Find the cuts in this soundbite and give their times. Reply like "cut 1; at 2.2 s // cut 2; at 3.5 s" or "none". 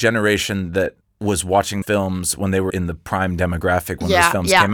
cut 1; at 1.0 s // cut 2; at 1.8 s // cut 3; at 2.7 s